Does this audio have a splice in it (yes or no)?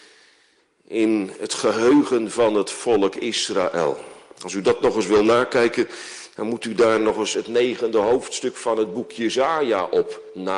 no